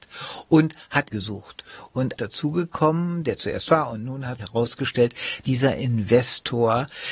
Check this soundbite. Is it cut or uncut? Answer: cut